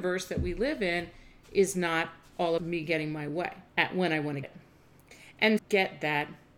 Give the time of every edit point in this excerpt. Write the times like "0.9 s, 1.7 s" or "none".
2.6 s, 3.7 s, 4.4 s, 5.6 s

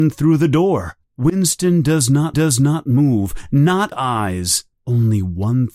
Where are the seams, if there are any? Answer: 1.0 s, 2.3 s, 3.9 s, 4.7 s

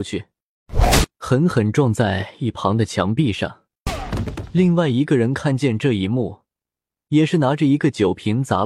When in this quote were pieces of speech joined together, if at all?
none

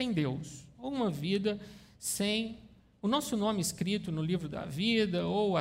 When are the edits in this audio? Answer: none

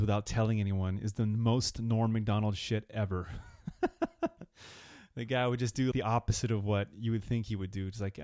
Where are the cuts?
5.9 s

